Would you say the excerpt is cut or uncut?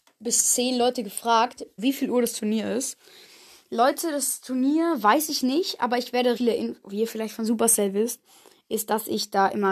cut